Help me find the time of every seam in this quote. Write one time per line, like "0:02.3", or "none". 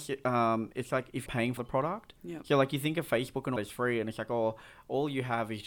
0:01.3
0:01.6
0:02.2
0:03.6